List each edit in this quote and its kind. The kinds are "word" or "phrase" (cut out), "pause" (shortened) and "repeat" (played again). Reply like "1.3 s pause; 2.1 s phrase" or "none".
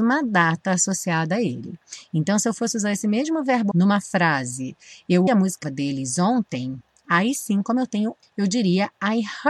3.7 s word; 5.3 s word; 5.6 s word; 8.2 s word